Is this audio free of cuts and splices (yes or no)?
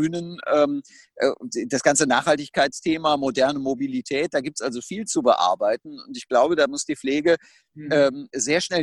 yes